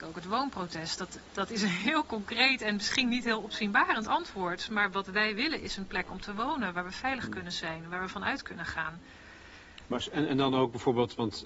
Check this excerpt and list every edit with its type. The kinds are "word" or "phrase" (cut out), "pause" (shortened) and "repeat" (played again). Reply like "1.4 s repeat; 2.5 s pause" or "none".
none